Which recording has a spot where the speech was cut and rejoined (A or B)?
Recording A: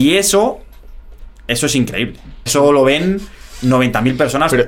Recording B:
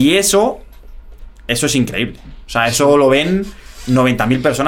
A